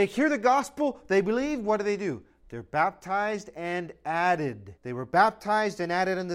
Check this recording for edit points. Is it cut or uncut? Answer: cut